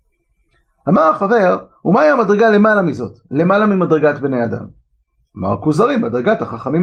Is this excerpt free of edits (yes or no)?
yes